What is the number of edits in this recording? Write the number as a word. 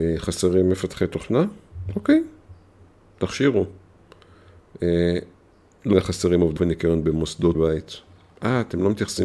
three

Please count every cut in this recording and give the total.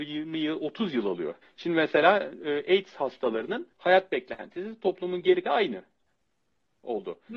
three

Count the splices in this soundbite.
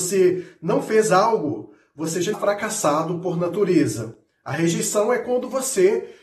one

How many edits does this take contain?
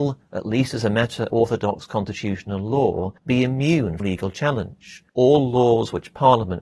four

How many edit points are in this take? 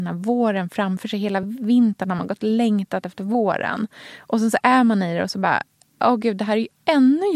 zero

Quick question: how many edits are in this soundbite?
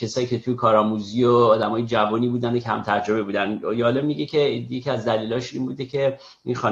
zero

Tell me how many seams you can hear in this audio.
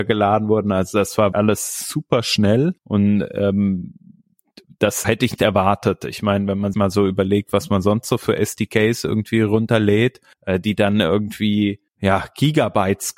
seven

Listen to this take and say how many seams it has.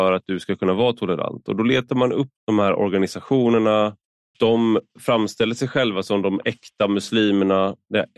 two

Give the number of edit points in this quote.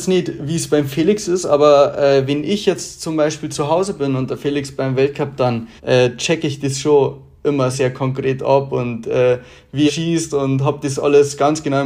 three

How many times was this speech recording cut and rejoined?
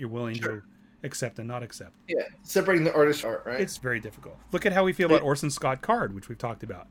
two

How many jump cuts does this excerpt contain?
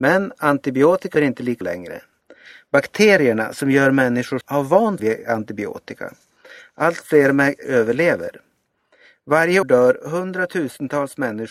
six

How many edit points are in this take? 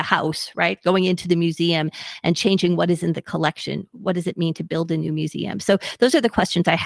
zero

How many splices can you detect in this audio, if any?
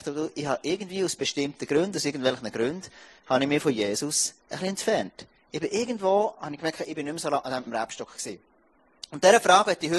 two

